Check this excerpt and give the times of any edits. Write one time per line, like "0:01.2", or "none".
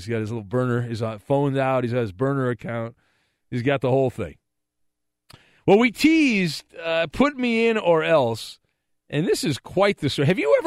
none